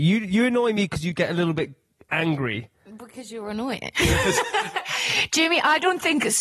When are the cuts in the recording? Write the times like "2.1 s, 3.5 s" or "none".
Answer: none